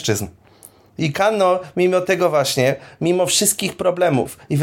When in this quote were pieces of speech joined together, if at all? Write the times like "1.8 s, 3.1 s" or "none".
none